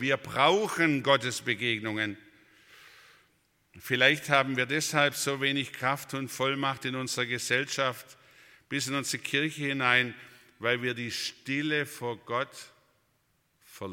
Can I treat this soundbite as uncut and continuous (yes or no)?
yes